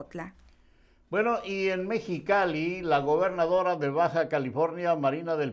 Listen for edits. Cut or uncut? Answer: uncut